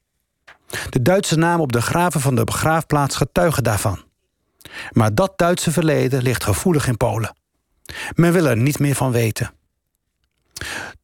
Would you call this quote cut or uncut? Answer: uncut